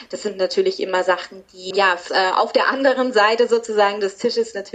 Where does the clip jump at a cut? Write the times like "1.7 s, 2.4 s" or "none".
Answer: 1.7 s, 2.1 s